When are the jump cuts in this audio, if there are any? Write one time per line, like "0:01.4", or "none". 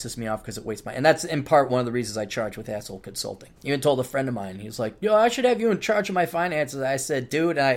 0:03.6